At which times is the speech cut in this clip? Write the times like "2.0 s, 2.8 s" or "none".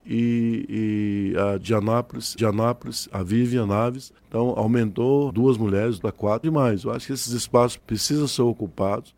1.6 s, 2.4 s, 4.2 s, 5.3 s, 6.0 s, 6.4 s, 7.8 s